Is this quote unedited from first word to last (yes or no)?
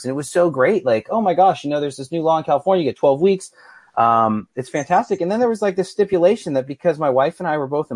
yes